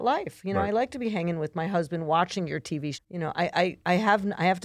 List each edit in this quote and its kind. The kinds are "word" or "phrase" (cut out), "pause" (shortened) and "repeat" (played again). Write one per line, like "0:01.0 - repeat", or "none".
0:02.9 - word